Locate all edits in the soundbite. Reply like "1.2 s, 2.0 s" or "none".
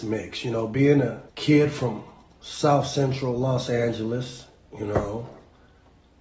1.3 s